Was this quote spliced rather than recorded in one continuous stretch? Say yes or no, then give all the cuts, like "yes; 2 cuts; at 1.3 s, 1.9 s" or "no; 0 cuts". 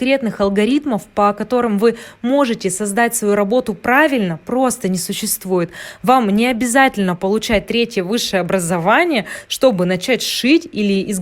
no; 0 cuts